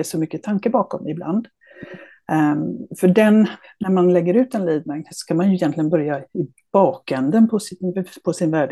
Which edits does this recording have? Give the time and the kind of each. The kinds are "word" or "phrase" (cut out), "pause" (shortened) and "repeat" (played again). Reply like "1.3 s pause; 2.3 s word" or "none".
none